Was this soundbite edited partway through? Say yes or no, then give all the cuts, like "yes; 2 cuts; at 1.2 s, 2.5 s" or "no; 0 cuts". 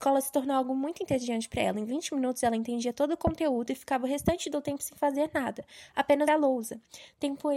yes; 1 cut; at 6.3 s